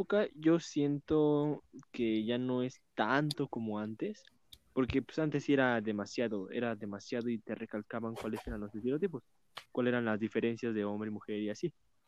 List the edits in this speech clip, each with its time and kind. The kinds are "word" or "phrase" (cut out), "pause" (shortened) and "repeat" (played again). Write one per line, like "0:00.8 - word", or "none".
0:04.5 - pause
0:09.7 - pause

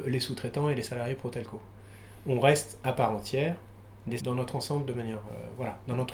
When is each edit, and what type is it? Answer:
0:04.2 - word

